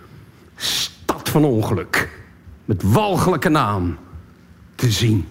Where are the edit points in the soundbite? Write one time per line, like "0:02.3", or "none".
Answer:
0:02.6